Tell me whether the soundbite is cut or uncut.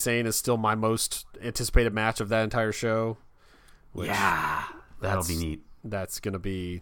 uncut